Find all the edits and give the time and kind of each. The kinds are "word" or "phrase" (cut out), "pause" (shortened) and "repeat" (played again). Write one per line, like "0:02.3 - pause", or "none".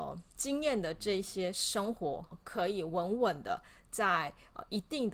0:02.3 - word